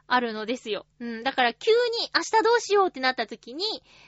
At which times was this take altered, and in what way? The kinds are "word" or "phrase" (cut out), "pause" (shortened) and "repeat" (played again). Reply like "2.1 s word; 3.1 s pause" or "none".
0.9 s pause